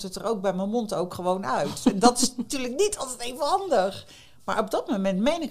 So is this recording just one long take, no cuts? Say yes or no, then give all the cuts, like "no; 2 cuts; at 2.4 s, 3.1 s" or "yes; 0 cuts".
yes; 0 cuts